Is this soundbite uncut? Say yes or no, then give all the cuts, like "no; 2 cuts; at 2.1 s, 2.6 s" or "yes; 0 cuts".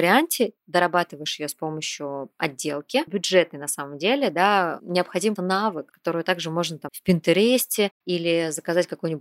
no; 4 cuts; at 3.1 s, 5.4 s, 5.9 s, 6.9 s